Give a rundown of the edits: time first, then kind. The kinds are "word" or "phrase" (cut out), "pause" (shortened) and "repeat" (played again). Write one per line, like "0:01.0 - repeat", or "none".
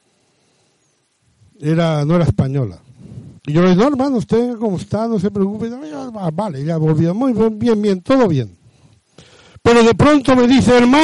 0:03.4 - pause